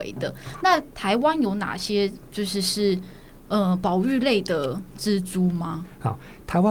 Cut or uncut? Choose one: uncut